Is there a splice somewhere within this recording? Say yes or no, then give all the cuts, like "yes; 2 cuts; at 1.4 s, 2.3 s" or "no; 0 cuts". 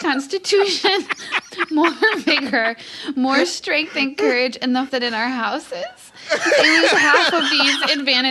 yes; 1 cut; at 4.9 s